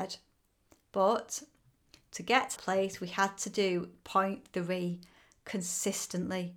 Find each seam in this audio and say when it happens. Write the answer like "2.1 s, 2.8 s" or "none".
2.6 s